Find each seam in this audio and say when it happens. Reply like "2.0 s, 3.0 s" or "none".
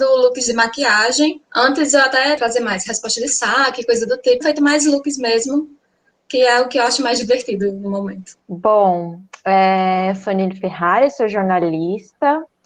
1.4 s, 2.4 s, 4.4 s, 8.4 s